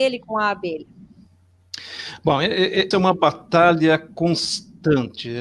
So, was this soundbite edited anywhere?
yes; 1 cut; at 2.9 s

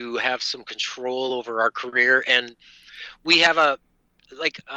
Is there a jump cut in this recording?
no; 0 cuts

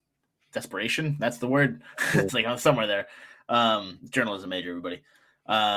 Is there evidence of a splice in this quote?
yes; 1 cut; at 2.3 s

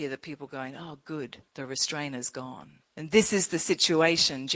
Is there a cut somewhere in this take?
yes; 2 cuts; at 1.5 s, 2.8 s

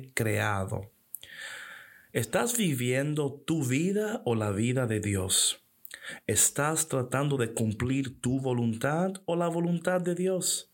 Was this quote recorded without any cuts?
yes; 0 cuts

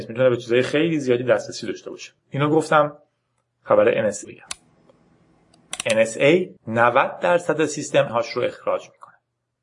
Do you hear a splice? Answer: yes; 4 cuts; at 2.2 s, 4.2 s, 6.6 s, 8.1 s

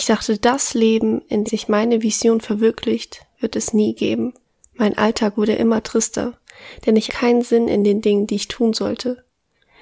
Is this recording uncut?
no; 3 cuts; at 1.5 s, 4.4 s, 7.1 s

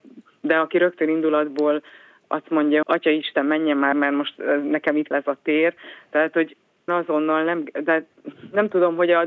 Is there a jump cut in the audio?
yes; 4 cuts; at 2.8 s, 3.9 s, 5.1 s, 6.9 s

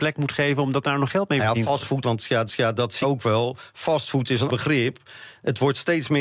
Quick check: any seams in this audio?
yes; 4 cuts; at 2.0 s, 2.5 s, 3.0 s, 4.5 s

